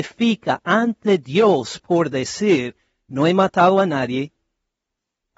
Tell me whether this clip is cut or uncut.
uncut